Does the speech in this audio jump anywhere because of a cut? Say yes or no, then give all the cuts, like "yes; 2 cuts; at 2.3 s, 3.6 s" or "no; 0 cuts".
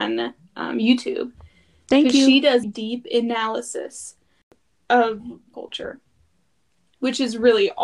yes; 2 cuts; at 2.6 s, 5.5 s